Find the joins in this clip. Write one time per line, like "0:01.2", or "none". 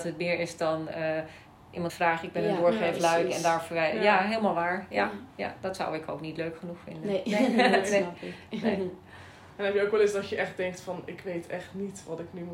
0:01.9